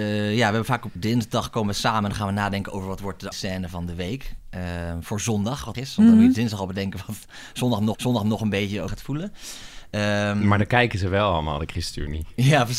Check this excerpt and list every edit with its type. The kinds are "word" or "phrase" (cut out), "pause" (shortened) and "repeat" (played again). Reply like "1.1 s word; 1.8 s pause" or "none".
1.0 s word; 3.3 s word; 5.7 s word; 7.9 s repeat; 8.9 s word